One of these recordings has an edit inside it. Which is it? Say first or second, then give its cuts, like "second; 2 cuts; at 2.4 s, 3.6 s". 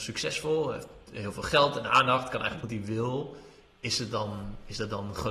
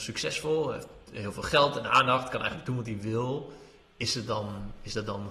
first; 1 cut; at 2.6 s